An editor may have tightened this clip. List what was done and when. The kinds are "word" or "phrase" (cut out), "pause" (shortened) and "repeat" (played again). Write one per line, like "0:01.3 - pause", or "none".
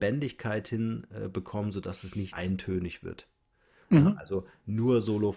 0:02.3 - word